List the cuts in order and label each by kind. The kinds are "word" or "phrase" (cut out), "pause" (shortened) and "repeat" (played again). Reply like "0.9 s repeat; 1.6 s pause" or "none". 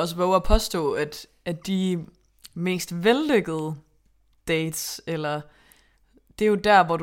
none